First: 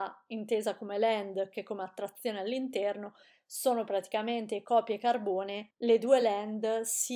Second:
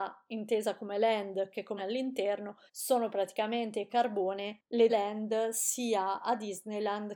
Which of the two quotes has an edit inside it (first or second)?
second